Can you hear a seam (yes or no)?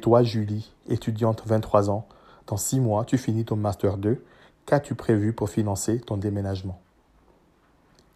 no